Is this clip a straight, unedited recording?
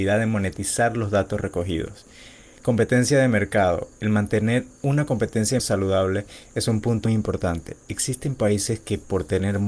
no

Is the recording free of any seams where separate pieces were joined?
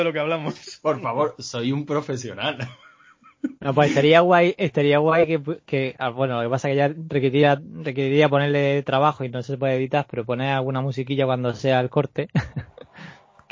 no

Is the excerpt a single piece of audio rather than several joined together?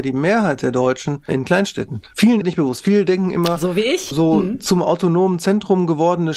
no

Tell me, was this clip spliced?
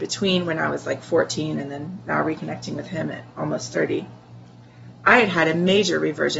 no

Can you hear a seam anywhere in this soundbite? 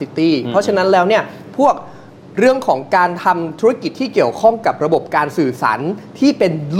yes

